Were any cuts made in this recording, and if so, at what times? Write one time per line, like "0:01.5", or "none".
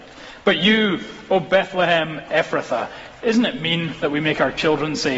none